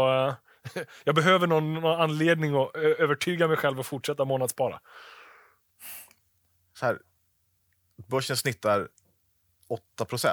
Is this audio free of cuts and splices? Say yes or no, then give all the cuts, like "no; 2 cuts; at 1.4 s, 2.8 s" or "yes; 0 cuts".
yes; 0 cuts